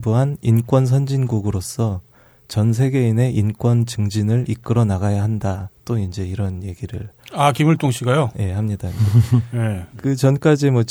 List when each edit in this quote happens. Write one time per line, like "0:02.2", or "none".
none